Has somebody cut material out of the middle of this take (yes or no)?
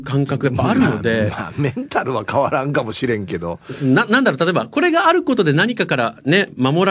no